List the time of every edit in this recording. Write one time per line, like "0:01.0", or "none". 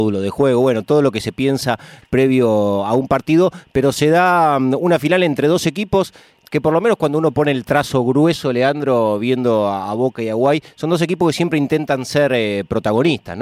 none